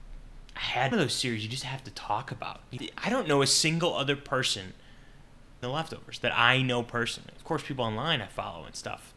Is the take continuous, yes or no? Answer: no